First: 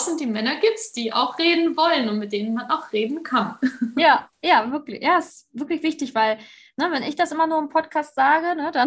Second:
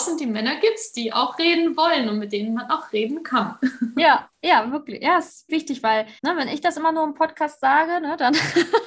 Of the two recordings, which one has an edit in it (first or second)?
second